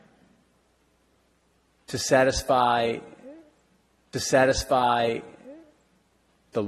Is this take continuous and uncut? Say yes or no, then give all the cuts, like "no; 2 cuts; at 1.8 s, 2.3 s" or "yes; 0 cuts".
no; 1 cut; at 4.1 s